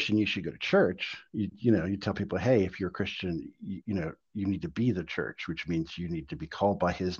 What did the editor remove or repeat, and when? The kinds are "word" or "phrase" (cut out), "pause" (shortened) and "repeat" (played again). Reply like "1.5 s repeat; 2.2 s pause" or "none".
1.3 s pause